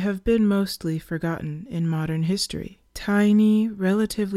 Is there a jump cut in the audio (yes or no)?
yes